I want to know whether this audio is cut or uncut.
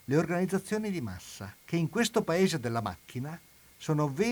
cut